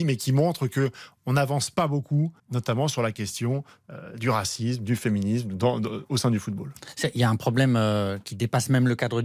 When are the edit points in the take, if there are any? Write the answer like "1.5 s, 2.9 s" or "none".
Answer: 2.4 s

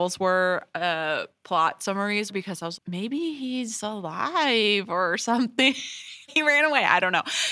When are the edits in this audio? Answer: 2.3 s, 2.8 s, 6.3 s

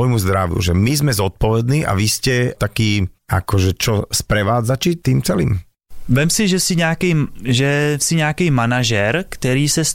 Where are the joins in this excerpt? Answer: 3.2 s

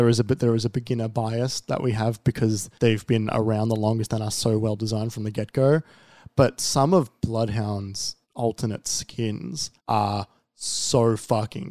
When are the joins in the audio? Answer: 2.8 s, 8.2 s, 9.8 s

